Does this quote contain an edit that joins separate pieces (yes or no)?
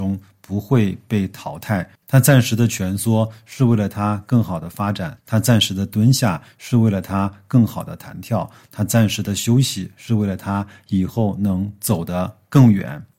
yes